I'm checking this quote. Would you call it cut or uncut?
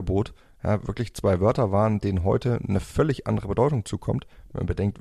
uncut